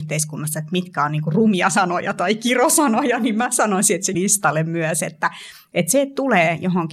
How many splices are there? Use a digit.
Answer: 1